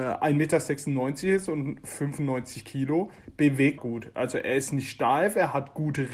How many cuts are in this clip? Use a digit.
1